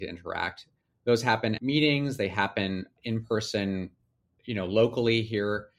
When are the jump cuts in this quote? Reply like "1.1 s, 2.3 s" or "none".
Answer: 1.6 s